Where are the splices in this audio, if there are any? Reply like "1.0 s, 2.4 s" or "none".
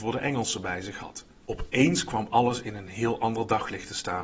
none